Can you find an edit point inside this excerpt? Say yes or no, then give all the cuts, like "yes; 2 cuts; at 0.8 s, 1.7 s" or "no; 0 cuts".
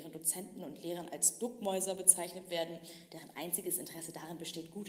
no; 0 cuts